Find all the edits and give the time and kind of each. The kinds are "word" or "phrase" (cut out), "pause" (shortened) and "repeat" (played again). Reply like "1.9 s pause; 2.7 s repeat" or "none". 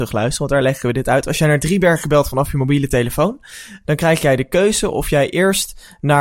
3.8 s word

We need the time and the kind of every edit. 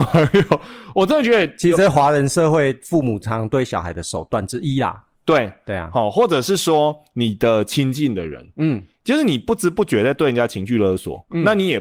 5.1 s pause

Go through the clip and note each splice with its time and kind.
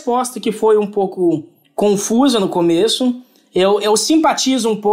none

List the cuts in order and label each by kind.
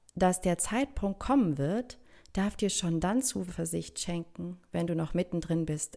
none

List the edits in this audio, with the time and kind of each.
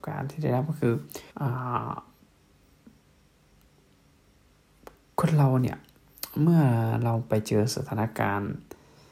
1.3 s pause

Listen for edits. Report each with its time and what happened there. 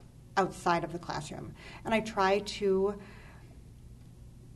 none

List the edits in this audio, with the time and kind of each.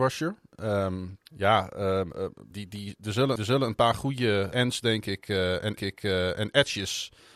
1.3 s pause; 2.5 s word; 3.4 s repeat; 4.5 s word; 5.8 s repeat

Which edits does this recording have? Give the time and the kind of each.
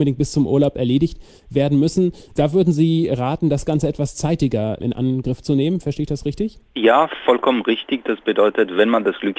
none

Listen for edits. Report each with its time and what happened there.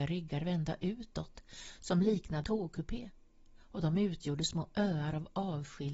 2.4 s phrase

